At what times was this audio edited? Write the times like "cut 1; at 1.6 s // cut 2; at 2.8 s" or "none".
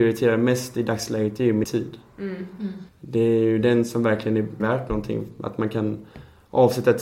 cut 1; at 1.6 s // cut 2; at 2.9 s // cut 3; at 4.6 s